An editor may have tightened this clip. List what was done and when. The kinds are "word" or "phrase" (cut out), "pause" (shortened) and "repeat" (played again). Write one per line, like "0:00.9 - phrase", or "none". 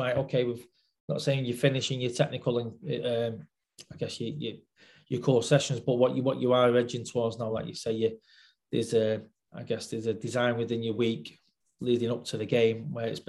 none

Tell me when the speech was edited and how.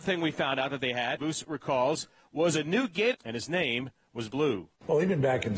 0:01.2 - word
0:03.1 - word
0:04.3 - word

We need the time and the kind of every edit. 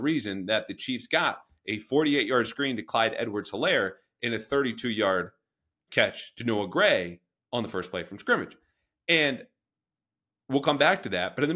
none

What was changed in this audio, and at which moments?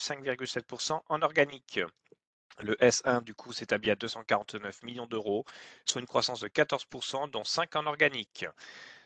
none

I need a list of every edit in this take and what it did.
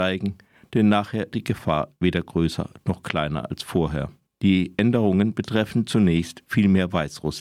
0:01.3 - word
0:04.3 - pause

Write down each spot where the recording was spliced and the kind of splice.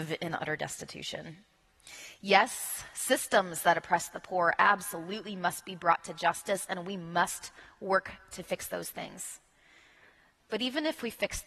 none

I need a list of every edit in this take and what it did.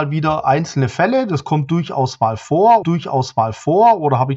0:02.8 - repeat

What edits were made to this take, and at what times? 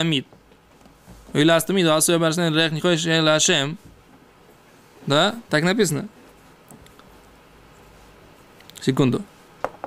none

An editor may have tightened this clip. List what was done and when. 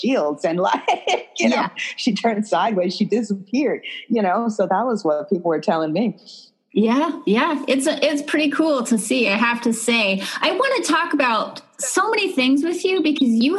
0:04.7 - word

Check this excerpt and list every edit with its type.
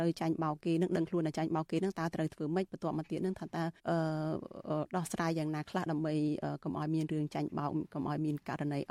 0:03.8 - pause

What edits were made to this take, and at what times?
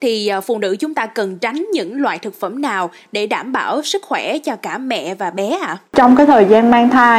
0:05.9 - pause

